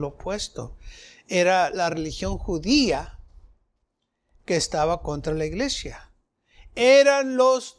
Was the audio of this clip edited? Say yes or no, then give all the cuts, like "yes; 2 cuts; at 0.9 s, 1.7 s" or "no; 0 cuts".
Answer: no; 0 cuts